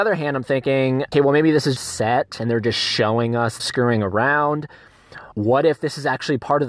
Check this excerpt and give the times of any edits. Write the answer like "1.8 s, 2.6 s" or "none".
1.1 s, 1.8 s, 3.6 s, 5.3 s